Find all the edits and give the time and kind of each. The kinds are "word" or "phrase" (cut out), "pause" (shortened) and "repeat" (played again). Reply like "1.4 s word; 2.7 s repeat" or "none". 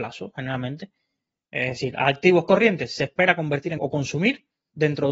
3.8 s word